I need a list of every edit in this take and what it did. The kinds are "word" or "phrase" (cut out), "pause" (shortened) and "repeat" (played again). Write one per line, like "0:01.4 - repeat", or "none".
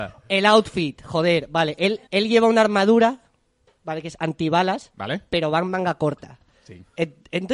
0:02.1 - pause